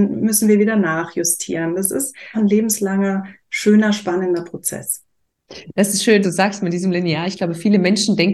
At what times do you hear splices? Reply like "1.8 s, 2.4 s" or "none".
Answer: 2.3 s, 6.2 s